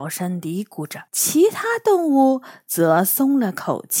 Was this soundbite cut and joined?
yes; 1 cut; at 1.1 s

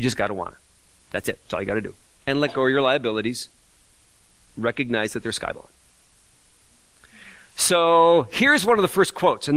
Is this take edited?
no; 0 cuts

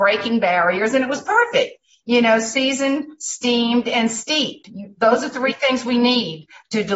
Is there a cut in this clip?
no; 0 cuts

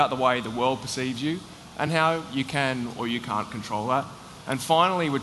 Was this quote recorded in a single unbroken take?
yes; 0 cuts

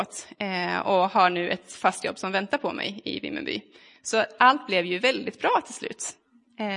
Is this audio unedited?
yes; 0 cuts

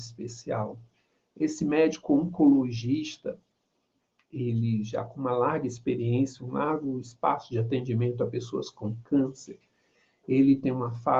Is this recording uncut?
yes; 0 cuts

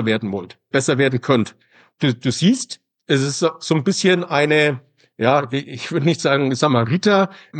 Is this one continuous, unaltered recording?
yes; 0 cuts

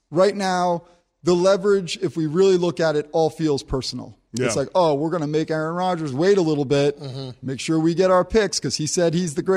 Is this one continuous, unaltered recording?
yes; 0 cuts

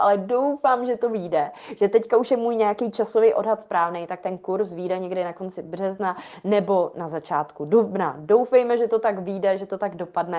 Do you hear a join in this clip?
no; 0 cuts

